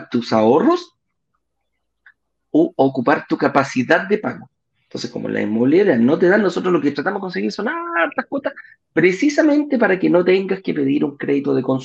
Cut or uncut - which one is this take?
uncut